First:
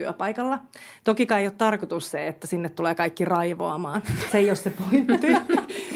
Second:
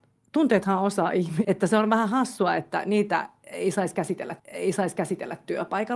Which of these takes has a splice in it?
second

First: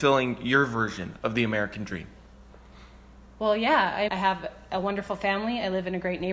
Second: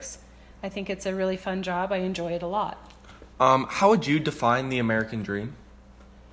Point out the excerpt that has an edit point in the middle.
first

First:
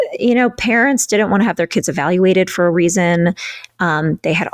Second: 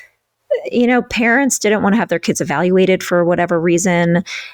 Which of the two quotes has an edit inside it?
first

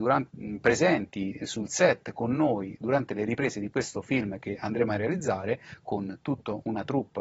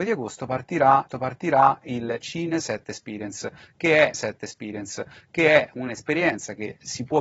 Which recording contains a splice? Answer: second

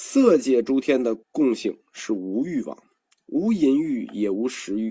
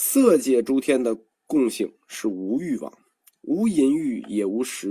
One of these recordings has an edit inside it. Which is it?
first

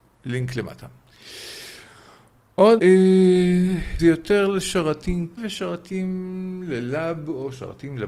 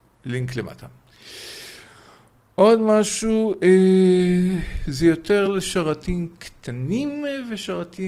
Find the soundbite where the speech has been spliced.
first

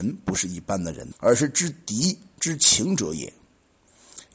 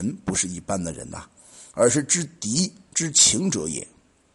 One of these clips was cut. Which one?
first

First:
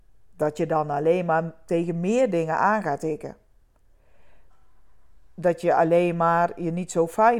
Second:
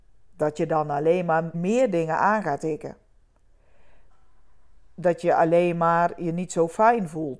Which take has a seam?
second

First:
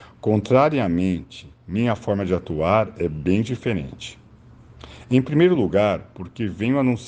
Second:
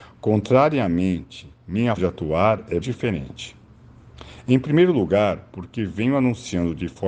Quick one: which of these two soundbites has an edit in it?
second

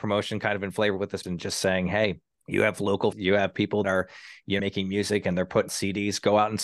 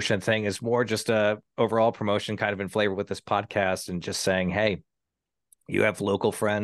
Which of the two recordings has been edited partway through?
first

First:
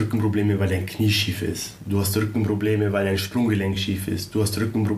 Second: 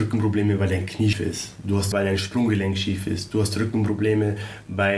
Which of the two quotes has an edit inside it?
second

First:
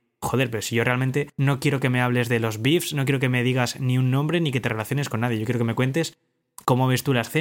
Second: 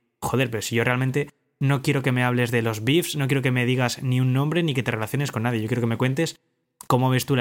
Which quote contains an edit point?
first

